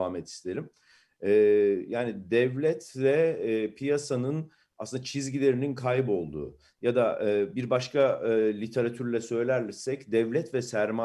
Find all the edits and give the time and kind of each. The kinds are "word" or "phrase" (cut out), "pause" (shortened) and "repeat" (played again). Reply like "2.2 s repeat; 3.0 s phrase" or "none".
none